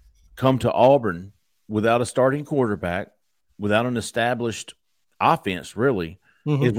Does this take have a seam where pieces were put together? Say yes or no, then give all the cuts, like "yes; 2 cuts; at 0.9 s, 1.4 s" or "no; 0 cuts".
no; 0 cuts